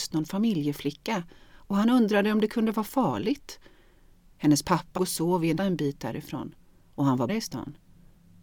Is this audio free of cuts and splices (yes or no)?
no